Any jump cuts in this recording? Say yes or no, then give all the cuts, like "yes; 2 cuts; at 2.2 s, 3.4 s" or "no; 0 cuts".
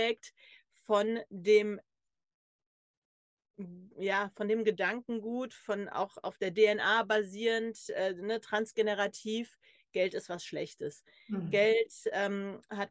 no; 0 cuts